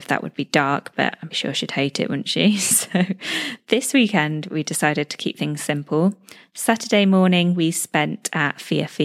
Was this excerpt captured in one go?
no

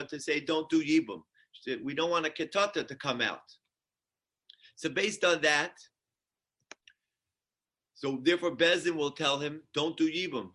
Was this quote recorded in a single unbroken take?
yes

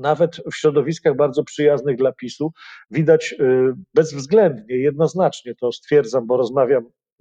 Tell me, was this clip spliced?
no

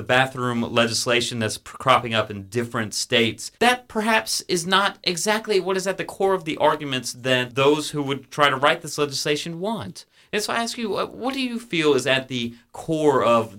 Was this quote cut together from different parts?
yes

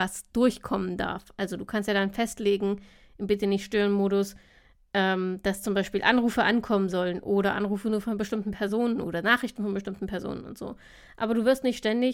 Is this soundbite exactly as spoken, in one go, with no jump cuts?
yes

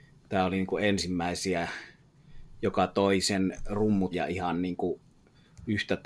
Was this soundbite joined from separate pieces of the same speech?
yes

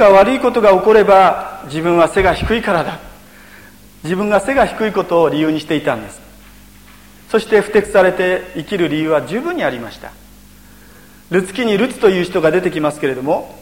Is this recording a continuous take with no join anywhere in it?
yes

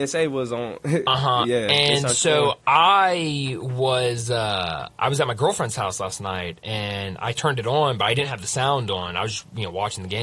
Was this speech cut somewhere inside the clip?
no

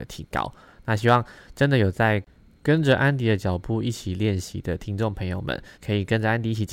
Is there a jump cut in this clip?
yes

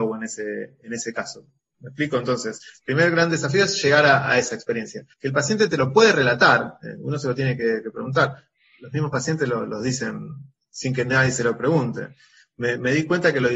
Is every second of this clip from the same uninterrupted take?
no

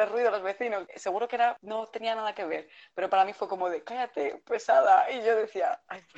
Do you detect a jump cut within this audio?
no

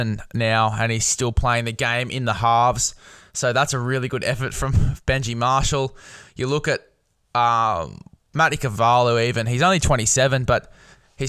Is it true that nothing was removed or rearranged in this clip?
yes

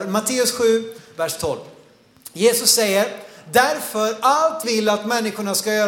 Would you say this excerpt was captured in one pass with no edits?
no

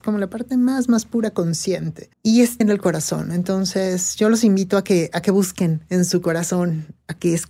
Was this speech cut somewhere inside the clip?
yes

